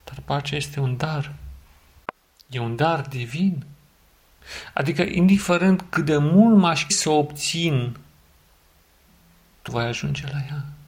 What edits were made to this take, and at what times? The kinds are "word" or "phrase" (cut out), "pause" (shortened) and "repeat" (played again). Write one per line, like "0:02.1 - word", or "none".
0:06.9 - word
0:09.7 - word